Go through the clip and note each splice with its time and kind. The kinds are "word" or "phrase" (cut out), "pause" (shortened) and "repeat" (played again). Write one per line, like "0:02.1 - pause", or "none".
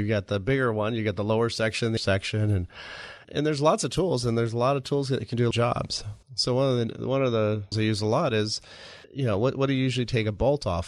0:02.0 - word
0:03.2 - word
0:05.5 - phrase
0:06.2 - pause
0:07.7 - word
0:09.0 - pause

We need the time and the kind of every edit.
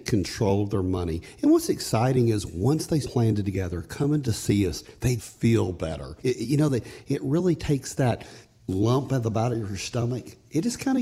0:03.0 - phrase
0:05.2 - word
0:06.2 - pause

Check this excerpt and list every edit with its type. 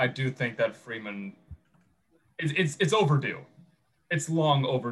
none

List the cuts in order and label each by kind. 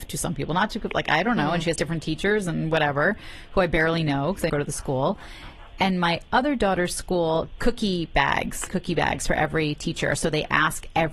0:01.8 - word
0:04.5 - word
0:07.6 - word
0:08.7 - word

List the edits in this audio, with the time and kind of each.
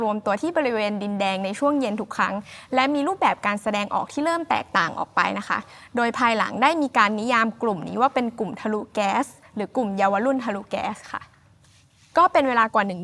none

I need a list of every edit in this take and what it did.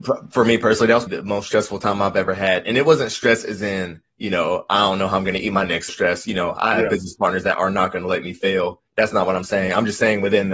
0:01.1 - word
0:05.9 - word
0:08.9 - pause

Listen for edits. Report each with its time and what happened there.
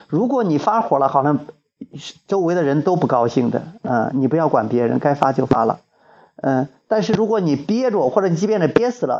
none

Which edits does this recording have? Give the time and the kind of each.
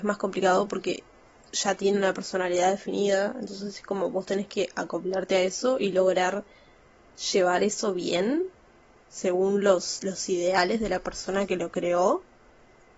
none

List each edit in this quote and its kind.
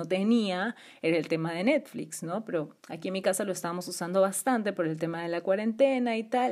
0:02.8 - pause

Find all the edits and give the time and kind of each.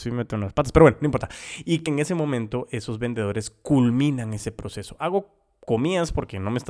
0:01.9 - word

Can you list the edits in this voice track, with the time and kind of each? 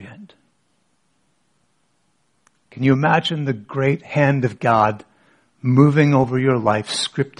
none

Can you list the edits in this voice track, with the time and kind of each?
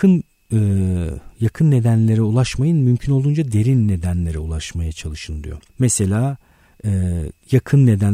0:05.7 - pause

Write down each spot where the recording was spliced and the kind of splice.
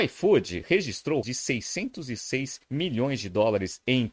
0:01.2 - word
0:02.6 - pause

